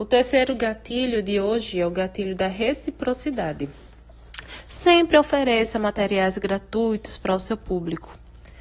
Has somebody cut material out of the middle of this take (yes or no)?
no